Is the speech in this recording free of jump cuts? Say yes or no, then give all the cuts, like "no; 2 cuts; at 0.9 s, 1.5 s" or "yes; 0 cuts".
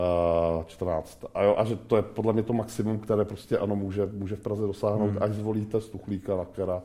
yes; 0 cuts